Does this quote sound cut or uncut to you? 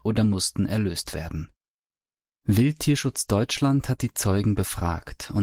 uncut